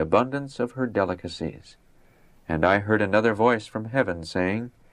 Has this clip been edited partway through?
no; 0 cuts

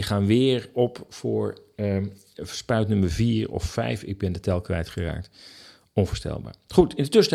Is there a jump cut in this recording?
no; 0 cuts

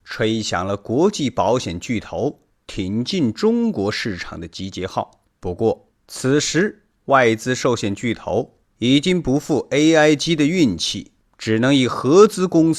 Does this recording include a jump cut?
no; 0 cuts

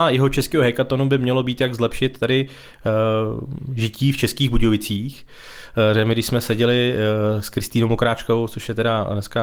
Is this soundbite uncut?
yes; 0 cuts

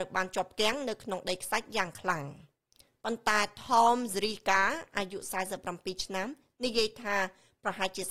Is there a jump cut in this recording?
no; 0 cuts

